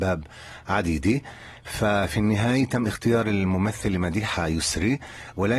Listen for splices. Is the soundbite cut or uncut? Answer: uncut